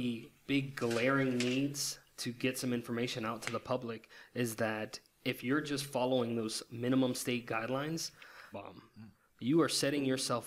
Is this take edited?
yes; 1 cut; at 8.5 s

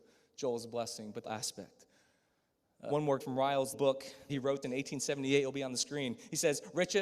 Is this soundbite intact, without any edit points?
no; 6 cuts; at 1.2 s, 2.9 s, 3.2 s, 3.7 s, 4.3 s, 4.6 s

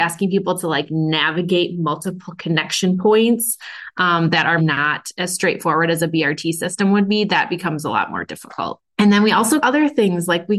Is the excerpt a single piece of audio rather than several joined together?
no; 3 cuts; at 4.6 s, 8.9 s, 9.6 s

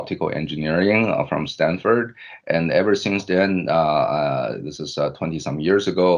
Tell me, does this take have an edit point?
no; 0 cuts

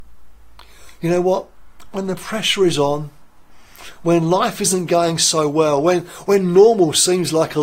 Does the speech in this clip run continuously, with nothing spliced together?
yes; 0 cuts

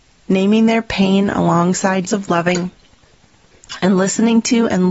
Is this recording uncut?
no; 1 cut; at 2.1 s

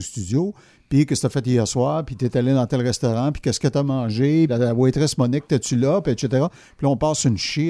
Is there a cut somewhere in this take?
yes; 1 cut; at 4.5 s

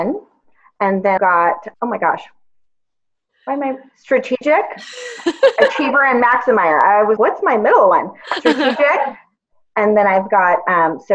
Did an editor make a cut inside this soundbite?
yes; 3 cuts; at 1.2 s, 1.7 s, 7.2 s

